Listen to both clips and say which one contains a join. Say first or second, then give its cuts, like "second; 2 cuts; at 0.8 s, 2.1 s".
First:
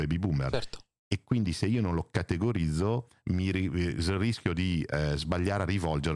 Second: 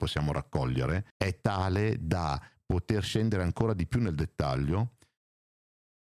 second; 1 cut; at 1.1 s